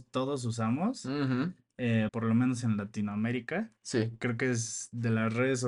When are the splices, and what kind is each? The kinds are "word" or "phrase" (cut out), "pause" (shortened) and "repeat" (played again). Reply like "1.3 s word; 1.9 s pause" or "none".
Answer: 2.1 s word; 3.8 s pause